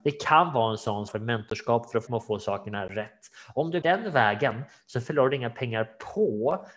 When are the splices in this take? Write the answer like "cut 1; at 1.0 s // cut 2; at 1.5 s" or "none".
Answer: cut 1; at 1.1 s // cut 2; at 2.1 s // cut 3; at 3.8 s